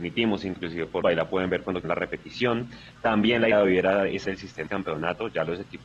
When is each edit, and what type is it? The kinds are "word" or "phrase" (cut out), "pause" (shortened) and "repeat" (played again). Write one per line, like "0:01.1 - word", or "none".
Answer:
0:01.0 - word
0:01.8 - word
0:03.5 - word
0:04.2 - word
0:04.7 - word